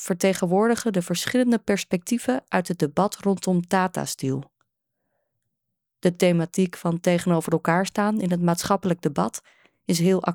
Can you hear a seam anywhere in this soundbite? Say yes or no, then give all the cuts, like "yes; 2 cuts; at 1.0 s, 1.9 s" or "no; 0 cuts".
no; 0 cuts